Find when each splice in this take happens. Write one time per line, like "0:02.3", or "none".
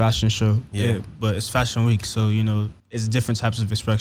0:02.8